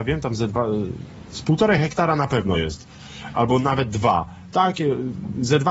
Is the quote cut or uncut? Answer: uncut